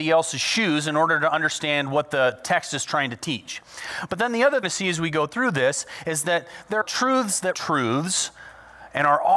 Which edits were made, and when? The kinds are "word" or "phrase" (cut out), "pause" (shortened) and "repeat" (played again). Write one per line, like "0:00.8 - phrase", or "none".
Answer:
0:04.6 - phrase
0:06.8 - word
0:07.5 - word